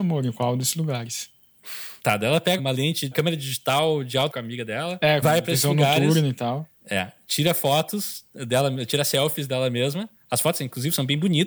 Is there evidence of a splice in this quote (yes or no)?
yes